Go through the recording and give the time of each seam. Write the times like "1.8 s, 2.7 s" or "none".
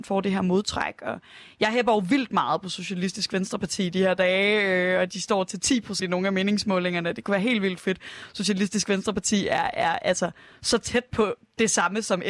6.0 s

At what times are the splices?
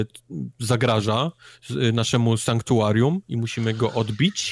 none

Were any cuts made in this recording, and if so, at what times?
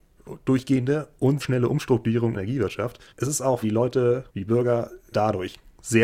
1.4 s, 2.3 s, 3.1 s, 3.6 s, 4.3 s, 5.1 s

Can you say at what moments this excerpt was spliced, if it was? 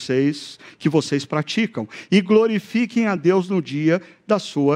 none

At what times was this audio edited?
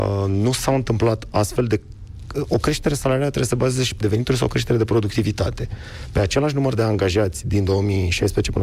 4.0 s

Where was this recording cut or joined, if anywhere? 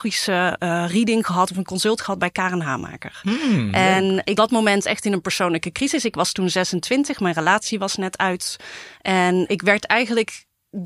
4.4 s, 9.5 s

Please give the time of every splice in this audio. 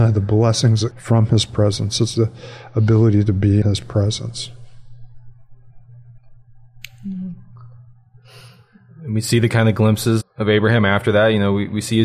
0.9 s, 2.1 s, 3.6 s, 10.2 s

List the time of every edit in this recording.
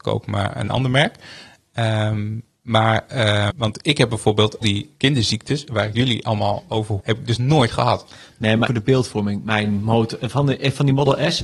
3.5 s, 4.6 s, 5.6 s, 7.0 s, 8.7 s

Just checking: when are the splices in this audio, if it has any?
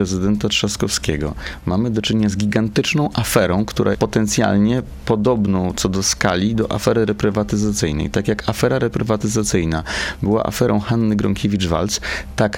3.9 s

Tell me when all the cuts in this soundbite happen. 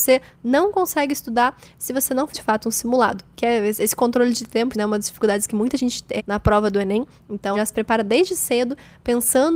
2.3 s, 4.7 s, 6.2 s, 7.5 s

